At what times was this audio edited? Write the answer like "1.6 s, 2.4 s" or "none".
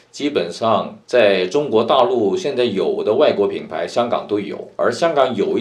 1.0 s